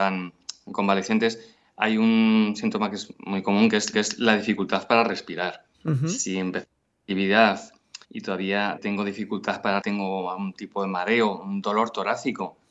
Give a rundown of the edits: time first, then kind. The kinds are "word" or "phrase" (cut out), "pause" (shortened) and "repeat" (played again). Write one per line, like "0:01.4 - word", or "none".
0:03.1 - word
0:03.9 - repeat
0:05.7 - pause
0:08.0 - pause
0:08.8 - word
0:09.8 - word